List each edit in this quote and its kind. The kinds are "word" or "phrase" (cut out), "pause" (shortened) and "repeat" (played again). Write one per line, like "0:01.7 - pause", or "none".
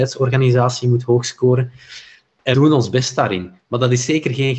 0:02.5 - word